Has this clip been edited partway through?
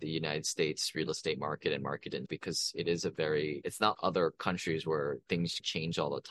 yes; 2 cuts; at 2.3 s, 3.9 s

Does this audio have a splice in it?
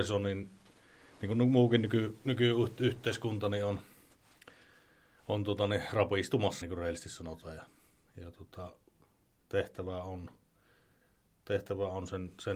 yes; 1 cut; at 6.6 s

